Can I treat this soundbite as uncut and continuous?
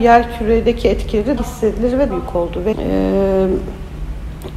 no; 3 cuts; at 1.4 s, 2.1 s, 2.7 s

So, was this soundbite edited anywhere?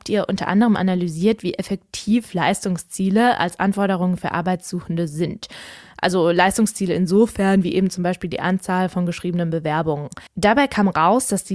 yes; 1 cut; at 10.3 s

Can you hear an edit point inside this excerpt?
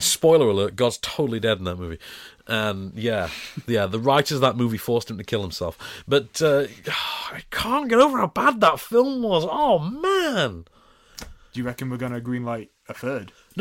no; 0 cuts

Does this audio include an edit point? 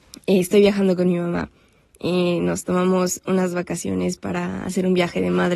no; 0 cuts

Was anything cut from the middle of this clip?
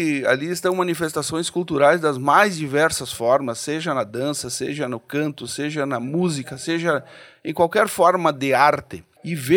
no; 0 cuts

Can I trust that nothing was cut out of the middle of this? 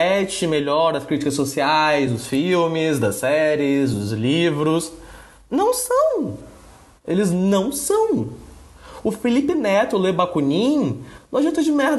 yes; 0 cuts

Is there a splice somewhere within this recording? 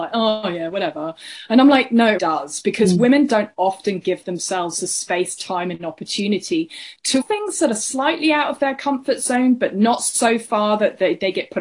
yes; 2 cuts; at 2.2 s, 7.2 s

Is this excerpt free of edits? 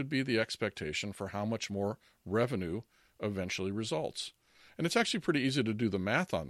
yes; 0 cuts

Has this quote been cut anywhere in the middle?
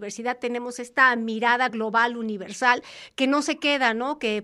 no; 0 cuts

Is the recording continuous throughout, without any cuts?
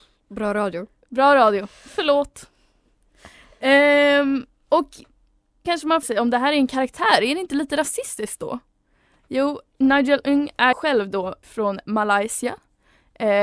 no; 5 cuts; at 5.6 s, 6.0 s, 9.7 s, 10.7 s, 11.4 s

